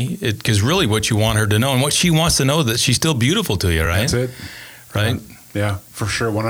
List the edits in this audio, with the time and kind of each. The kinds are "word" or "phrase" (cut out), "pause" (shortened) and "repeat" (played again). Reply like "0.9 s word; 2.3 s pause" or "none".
none